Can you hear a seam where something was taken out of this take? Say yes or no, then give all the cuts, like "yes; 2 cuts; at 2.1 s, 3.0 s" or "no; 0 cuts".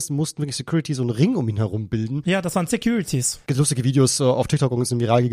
yes; 1 cut; at 2.7 s